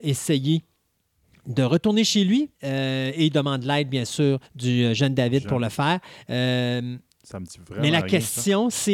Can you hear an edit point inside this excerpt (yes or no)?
yes